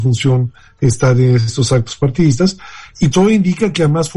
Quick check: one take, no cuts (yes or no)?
no